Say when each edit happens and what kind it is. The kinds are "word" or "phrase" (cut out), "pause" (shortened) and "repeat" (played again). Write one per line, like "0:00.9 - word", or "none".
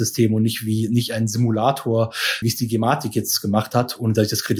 0:02.4 - word